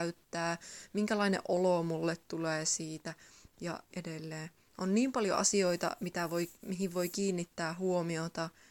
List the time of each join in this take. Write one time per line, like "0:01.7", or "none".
0:03.9